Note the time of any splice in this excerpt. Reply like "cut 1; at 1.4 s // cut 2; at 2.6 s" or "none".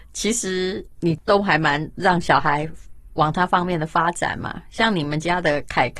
cut 1; at 0.9 s